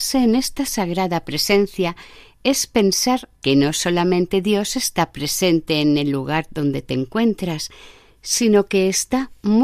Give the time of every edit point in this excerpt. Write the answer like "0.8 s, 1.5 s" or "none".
none